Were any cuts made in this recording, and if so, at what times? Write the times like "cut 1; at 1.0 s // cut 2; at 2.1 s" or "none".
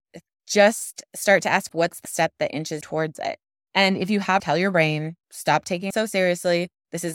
cut 1; at 1.7 s // cut 2; at 2.0 s // cut 3; at 2.8 s // cut 4; at 4.4 s // cut 5; at 5.2 s // cut 6; at 5.9 s